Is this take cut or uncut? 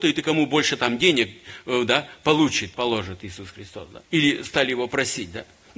cut